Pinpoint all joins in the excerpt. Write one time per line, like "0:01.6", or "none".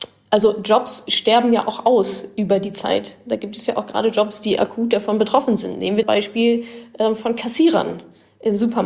0:06.0